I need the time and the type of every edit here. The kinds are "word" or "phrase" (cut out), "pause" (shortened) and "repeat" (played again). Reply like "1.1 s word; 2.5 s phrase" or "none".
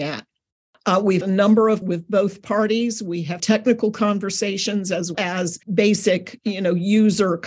1.2 s word; 1.8 s word; 3.4 s word; 5.1 s word; 5.6 s pause